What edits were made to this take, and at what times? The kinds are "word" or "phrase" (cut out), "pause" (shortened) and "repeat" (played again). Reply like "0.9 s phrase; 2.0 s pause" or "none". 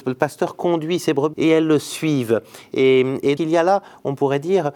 1.3 s word; 3.4 s word

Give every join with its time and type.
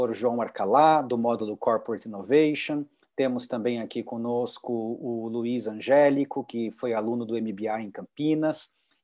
none

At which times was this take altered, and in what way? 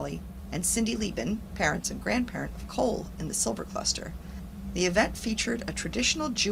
none

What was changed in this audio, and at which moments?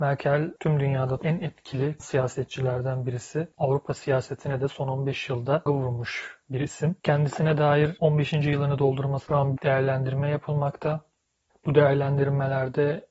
1.2 s word; 2.0 s word; 3.5 s word; 5.7 s word; 9.3 s word; 9.6 s word

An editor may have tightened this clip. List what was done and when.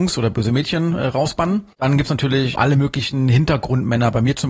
1.7 s pause; 2.5 s word

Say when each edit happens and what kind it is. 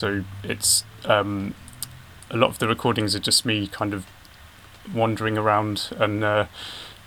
none

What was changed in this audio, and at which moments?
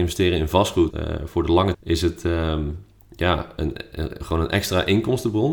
0.9 s phrase; 1.7 s word

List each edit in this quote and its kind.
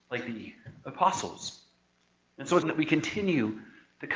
2.6 s word

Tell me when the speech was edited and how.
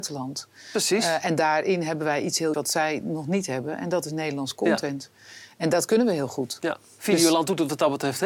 2.5 s word

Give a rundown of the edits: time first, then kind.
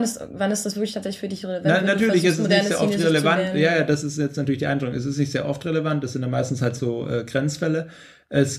none

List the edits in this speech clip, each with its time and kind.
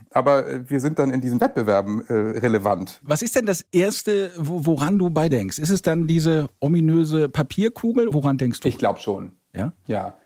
5.3 s phrase; 8.1 s word

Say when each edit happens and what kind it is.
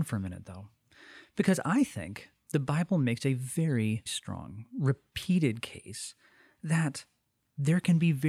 4.1 s word

